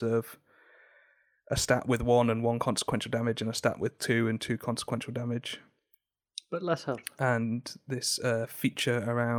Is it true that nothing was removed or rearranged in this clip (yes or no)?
yes